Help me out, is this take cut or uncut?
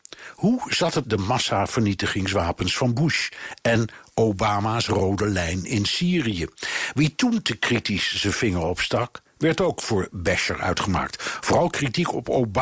cut